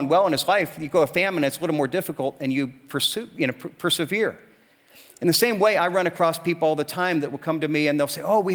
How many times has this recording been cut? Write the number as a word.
zero